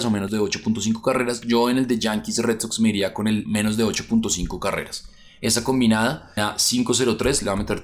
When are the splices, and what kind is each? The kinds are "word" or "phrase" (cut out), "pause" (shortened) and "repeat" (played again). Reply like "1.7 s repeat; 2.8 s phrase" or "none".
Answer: 6.4 s word